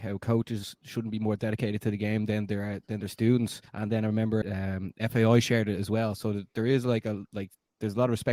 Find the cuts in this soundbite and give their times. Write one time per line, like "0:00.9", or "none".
0:03.7
0:04.4

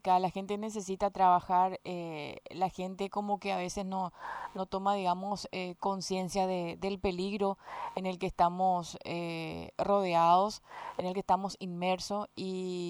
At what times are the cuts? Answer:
none

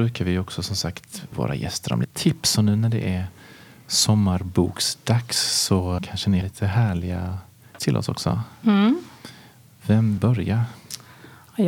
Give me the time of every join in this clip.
0:01.3
0:02.0
0:06.0
0:06.4
0:07.8
0:10.2

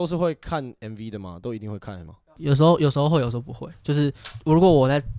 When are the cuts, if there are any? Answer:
0:02.1

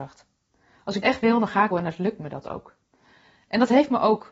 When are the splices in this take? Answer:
0:01.0
0:01.7

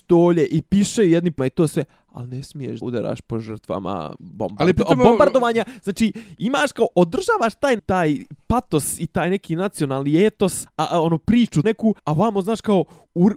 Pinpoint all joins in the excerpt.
0:01.4
0:02.8
0:07.8
0:10.7
0:11.6
0:12.0

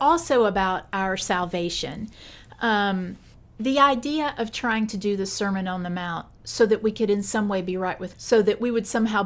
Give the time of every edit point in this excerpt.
0:03.3
0:08.1

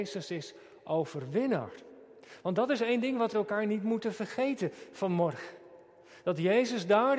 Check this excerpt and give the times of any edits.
0:03.3

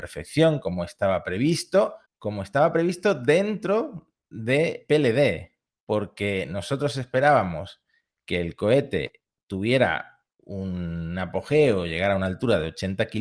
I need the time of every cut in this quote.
0:02.1

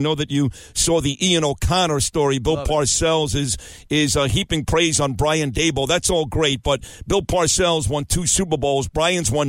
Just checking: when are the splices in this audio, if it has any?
none

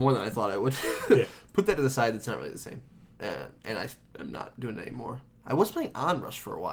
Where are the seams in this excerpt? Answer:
none

